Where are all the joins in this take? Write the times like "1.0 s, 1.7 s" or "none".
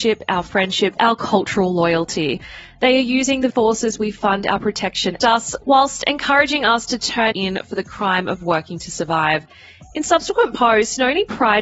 1.0 s, 3.5 s, 5.2 s, 7.3 s